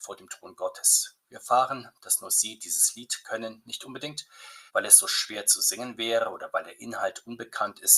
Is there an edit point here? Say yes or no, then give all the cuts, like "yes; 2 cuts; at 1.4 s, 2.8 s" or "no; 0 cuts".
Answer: yes; 1 cut; at 4.7 s